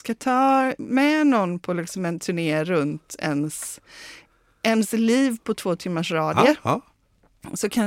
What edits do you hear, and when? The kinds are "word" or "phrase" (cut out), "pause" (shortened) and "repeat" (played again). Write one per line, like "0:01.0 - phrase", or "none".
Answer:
none